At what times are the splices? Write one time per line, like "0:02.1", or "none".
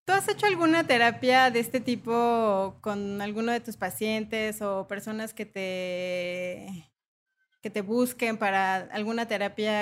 none